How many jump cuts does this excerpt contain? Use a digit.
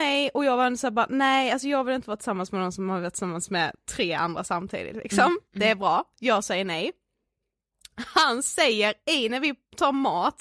0